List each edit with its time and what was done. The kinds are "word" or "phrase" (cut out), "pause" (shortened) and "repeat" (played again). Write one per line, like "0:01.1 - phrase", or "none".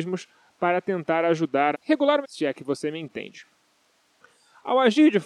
0:01.7 - word
0:02.2 - word